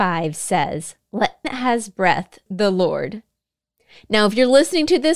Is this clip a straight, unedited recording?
no; 2 cuts; at 1.4 s, 2.5 s

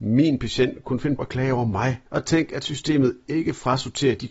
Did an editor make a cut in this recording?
yes; 2 cuts; at 1.2 s, 2.1 s

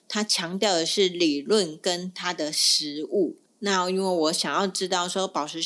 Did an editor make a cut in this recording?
yes; 1 cut; at 3.5 s

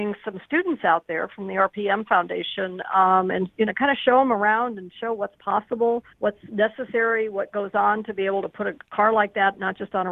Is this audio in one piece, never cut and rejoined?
no; 2 cuts; at 6.1 s, 8.8 s

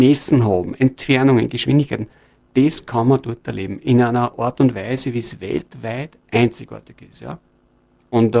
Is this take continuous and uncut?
yes; 0 cuts

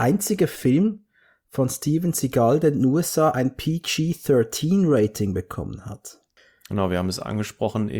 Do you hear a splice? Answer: no; 0 cuts

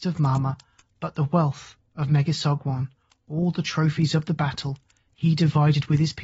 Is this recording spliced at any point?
no; 0 cuts

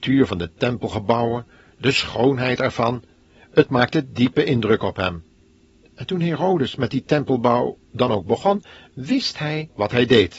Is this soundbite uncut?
yes; 0 cuts

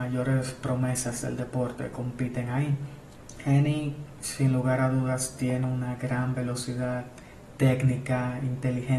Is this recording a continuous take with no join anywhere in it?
yes; 0 cuts

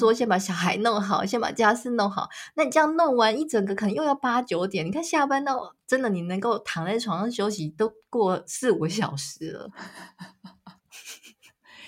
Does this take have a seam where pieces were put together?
yes; 1 cut; at 10.8 s

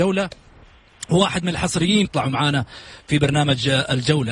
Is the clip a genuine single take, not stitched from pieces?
no; 1 cut; at 2.0 s

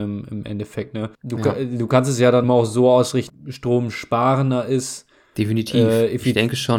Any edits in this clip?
yes; 3 cuts; at 1.1 s, 2.4 s, 3.3 s

